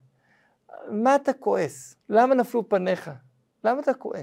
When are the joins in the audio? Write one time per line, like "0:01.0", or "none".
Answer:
0:02.0